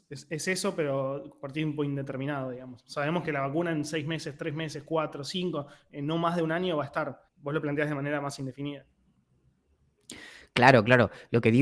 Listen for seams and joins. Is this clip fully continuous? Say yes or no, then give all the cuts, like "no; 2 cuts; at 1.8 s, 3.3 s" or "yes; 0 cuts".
no; 1 cut; at 7.3 s